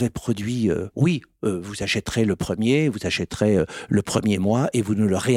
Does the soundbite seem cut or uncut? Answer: cut